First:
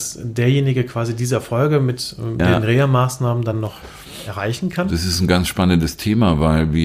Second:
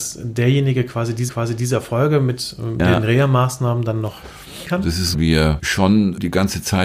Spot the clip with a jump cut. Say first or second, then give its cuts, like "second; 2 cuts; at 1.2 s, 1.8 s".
second; 3 cuts; at 1.3 s, 4.6 s, 5.1 s